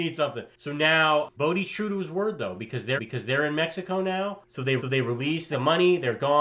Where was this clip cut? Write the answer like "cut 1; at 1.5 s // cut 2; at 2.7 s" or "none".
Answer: cut 1; at 3.0 s // cut 2; at 4.8 s // cut 3; at 5.5 s